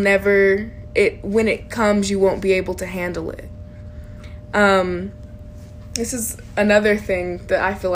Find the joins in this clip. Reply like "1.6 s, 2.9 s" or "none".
none